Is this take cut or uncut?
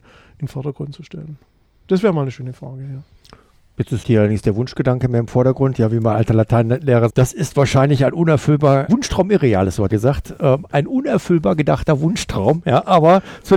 cut